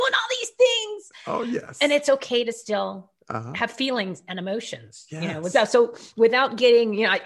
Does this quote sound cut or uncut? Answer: uncut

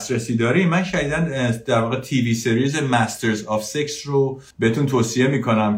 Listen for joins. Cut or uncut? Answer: cut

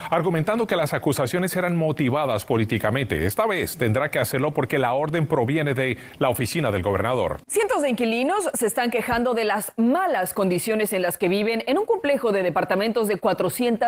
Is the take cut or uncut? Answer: cut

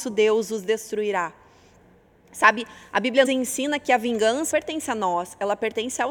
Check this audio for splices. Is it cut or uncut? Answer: cut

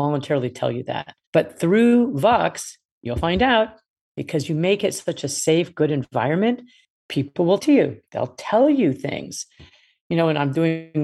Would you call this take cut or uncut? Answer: cut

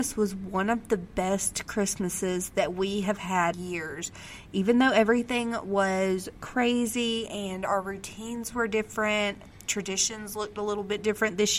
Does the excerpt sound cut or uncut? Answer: cut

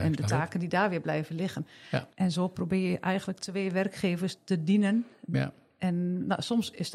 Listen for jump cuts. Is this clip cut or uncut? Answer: cut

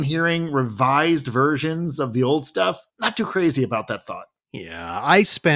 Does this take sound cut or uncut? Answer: cut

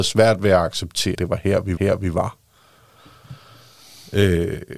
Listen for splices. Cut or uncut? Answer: cut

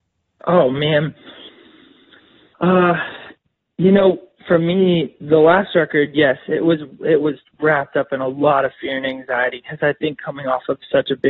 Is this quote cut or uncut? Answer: uncut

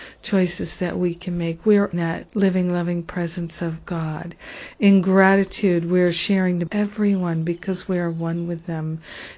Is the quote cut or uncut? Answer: cut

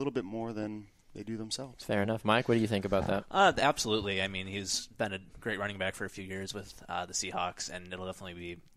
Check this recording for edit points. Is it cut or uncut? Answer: uncut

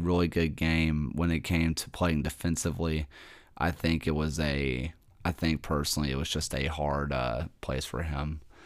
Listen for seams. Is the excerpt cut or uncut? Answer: uncut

